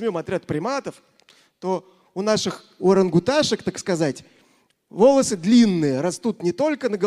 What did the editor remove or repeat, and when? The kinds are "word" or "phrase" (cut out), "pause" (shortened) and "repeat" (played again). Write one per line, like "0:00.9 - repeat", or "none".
0:02.8 - word

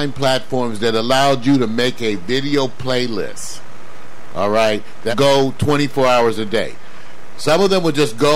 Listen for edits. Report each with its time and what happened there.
0:05.1 - word

